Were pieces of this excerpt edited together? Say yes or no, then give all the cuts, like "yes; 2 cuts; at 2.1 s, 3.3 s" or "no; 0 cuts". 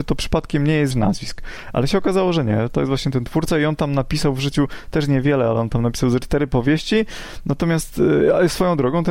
yes; 1 cut; at 0.9 s